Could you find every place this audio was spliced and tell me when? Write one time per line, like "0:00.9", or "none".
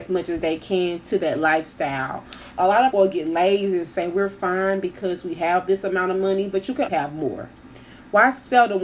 0:02.9
0:06.9